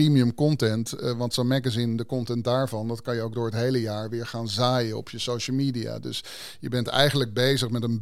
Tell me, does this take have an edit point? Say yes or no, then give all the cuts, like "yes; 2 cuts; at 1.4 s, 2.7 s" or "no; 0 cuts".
no; 0 cuts